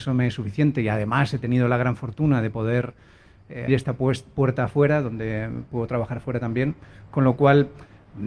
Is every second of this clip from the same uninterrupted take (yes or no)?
no